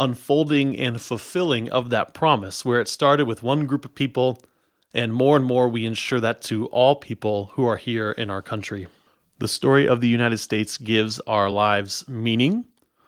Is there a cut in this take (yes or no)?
no